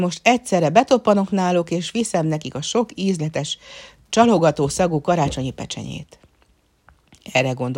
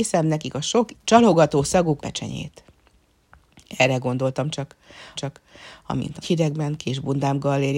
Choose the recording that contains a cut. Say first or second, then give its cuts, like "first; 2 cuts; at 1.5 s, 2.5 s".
second; 4 cuts; at 0.9 s, 2.0 s, 5.2 s, 6.2 s